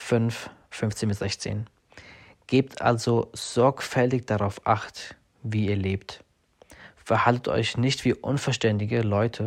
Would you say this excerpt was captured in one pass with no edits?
yes; 0 cuts

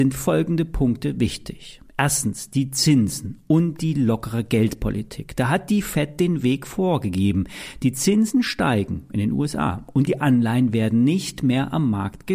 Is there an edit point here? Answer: no; 0 cuts

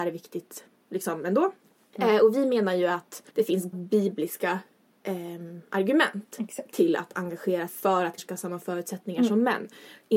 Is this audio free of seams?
no; 4 cuts; at 3.3 s, 3.7 s, 7.7 s, 8.2 s

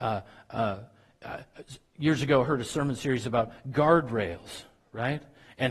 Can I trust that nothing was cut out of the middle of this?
yes; 0 cuts

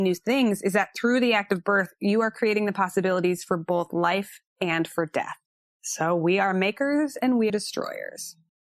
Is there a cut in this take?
yes; 3 cuts; at 4.5 s, 5.5 s, 7.5 s

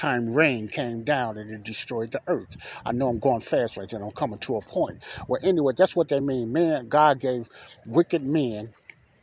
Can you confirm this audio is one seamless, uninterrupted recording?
yes; 0 cuts

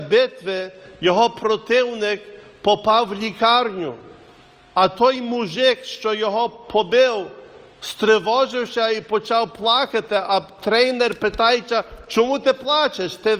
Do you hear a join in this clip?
no; 0 cuts

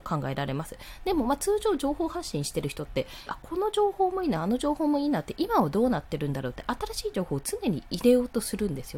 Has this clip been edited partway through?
yes; 1 cut; at 3.3 s

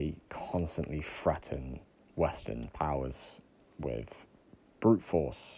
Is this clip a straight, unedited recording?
yes; 0 cuts

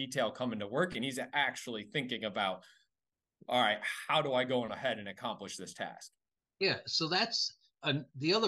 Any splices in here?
no; 0 cuts

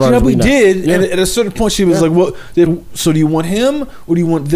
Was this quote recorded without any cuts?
no; 1 cut; at 2.7 s

